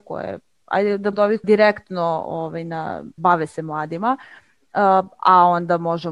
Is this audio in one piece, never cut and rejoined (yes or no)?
no